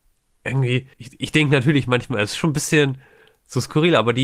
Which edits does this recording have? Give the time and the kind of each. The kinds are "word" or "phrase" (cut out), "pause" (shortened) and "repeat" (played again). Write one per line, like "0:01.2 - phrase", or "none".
0:00.9 - pause